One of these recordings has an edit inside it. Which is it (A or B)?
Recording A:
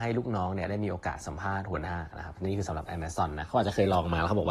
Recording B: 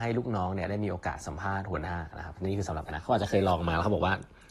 B